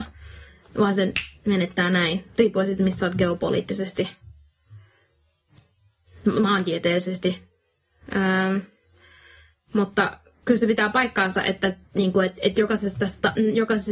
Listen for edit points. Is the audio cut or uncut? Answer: uncut